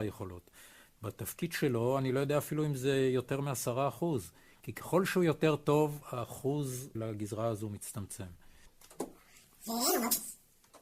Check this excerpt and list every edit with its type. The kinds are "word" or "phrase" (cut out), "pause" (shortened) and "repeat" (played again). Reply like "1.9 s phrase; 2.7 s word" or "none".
7.0 s word

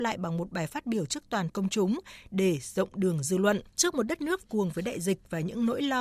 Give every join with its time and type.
1.5 s word; 3.7 s pause; 4.4 s phrase

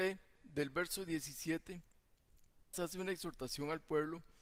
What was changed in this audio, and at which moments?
2.7 s word

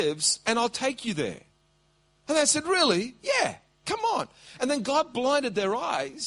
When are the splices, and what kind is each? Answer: none

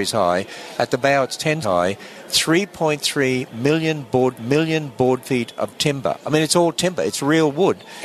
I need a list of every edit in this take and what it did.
1.6 s word; 4.4 s repeat

